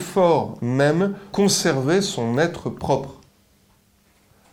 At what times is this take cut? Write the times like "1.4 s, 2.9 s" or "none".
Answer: 1.3 s